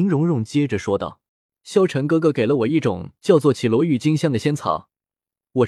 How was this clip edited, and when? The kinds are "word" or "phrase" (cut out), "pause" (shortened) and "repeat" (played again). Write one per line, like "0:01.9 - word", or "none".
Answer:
0:01.3 - pause